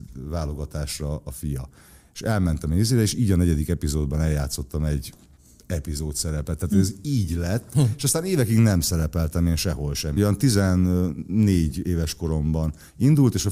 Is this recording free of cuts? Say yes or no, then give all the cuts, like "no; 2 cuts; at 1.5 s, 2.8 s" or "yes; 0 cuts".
yes; 0 cuts